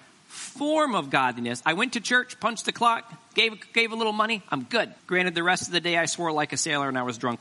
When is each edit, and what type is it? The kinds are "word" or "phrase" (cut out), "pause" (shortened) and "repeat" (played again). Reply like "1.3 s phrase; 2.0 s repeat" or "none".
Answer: 5.0 s pause